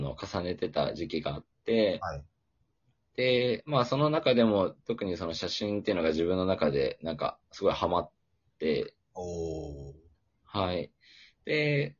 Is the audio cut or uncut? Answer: uncut